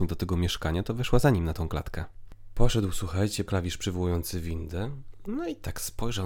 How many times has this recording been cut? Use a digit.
1